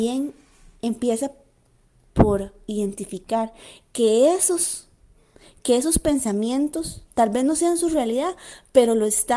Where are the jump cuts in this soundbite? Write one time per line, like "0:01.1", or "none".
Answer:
0:07.1